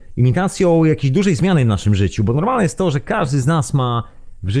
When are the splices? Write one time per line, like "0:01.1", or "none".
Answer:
none